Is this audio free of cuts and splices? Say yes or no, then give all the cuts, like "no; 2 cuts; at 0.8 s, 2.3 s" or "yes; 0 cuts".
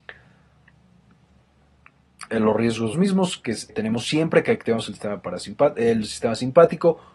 no; 3 cuts; at 2.3 s, 2.9 s, 3.7 s